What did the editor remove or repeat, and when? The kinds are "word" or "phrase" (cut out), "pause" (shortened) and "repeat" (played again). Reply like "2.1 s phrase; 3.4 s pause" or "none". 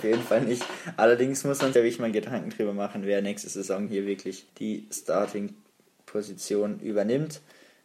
1.7 s word; 3.9 s word; 4.5 s pause